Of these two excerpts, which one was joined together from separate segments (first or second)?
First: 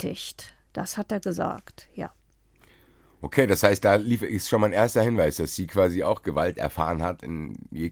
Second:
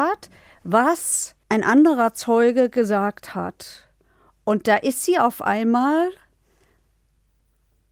second